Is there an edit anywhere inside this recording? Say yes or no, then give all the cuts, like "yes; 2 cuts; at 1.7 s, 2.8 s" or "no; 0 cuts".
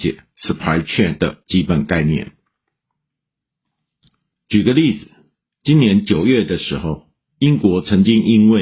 no; 0 cuts